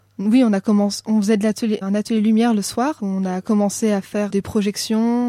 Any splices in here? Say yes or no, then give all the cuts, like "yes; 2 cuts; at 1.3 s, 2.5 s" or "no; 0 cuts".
yes; 3 cuts; at 1.8 s, 3.0 s, 4.3 s